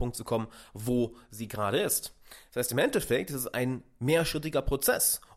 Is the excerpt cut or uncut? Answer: uncut